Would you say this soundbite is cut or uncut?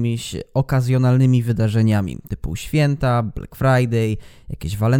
uncut